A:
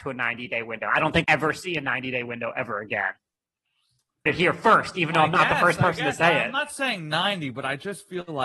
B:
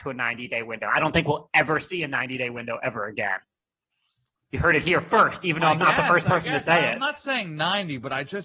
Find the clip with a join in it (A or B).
A